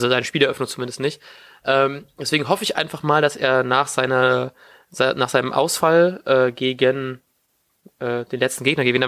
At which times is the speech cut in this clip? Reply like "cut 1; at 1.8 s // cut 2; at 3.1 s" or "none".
none